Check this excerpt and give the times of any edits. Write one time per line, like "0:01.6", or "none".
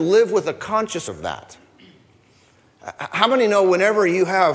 0:01.1